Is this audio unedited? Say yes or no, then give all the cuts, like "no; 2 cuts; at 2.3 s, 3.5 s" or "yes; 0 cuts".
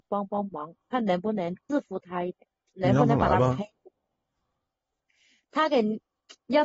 no; 1 cut; at 1.6 s